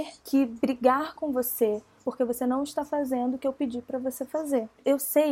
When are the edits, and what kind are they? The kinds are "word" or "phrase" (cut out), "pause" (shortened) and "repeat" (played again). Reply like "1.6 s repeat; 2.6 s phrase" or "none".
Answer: none